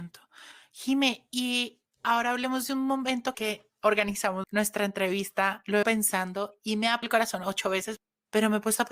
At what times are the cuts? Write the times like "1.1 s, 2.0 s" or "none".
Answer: 3.3 s, 4.4 s, 5.8 s, 7.0 s